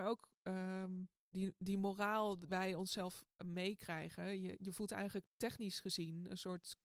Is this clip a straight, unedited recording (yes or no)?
no